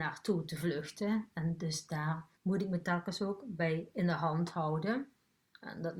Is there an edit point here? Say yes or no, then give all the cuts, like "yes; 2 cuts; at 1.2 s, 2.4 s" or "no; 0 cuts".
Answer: yes; 1 cut; at 2.3 s